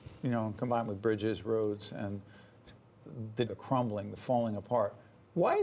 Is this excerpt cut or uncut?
cut